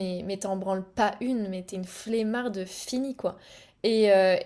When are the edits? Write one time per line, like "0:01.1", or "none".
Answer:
none